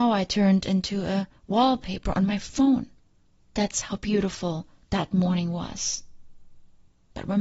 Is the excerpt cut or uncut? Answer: uncut